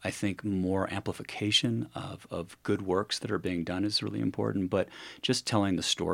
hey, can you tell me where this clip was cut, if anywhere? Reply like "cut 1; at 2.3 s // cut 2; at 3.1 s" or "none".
none